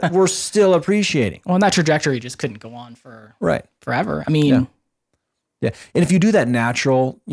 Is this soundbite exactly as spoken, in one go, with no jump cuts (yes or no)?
yes